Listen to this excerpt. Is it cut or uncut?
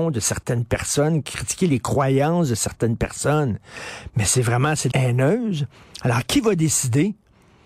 cut